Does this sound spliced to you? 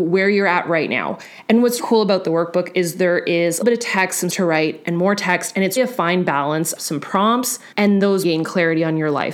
yes; 7 cuts; at 1.8 s, 3.6 s, 4.3 s, 5.8 s, 6.8 s, 7.7 s, 8.2 s

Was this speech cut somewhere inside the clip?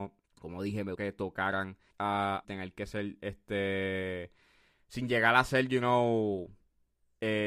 yes; 3 cuts; at 0.9 s, 1.9 s, 2.4 s

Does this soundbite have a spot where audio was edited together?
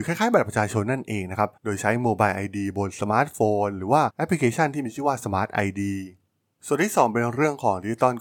yes; 1 cut; at 1.6 s

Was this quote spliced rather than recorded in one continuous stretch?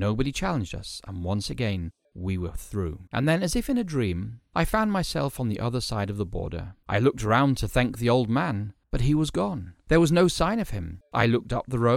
yes; 3 cuts; at 3.1 s, 6.8 s, 8.8 s

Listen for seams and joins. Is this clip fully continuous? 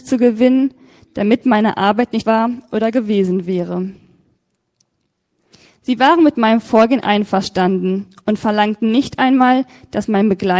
no; 1 cut; at 2.2 s

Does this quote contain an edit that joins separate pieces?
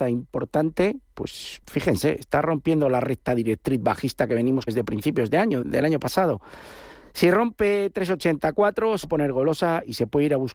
yes; 5 cuts; at 1.1 s, 1.6 s, 4.7 s, 5.6 s, 9.0 s

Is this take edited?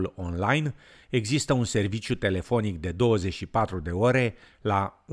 no; 0 cuts

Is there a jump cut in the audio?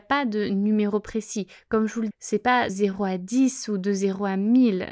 yes; 2 cuts; at 2.1 s, 2.7 s

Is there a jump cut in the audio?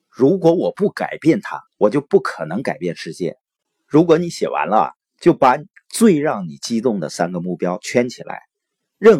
yes; 1 cut; at 1.7 s

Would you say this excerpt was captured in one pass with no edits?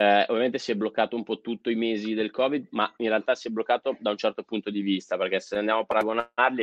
yes; 0 cuts

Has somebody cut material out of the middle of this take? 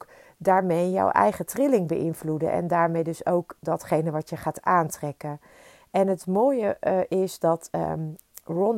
no; 0 cuts

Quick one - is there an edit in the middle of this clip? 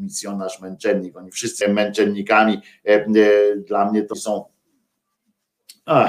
yes; 2 cuts; at 1.6 s, 4.1 s

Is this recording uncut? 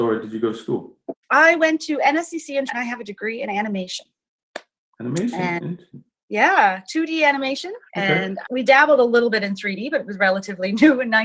no; 4 cuts; at 1.2 s, 2.7 s, 7.9 s, 8.4 s

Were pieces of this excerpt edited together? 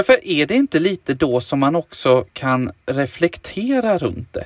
yes; 1 cut; at 2.3 s

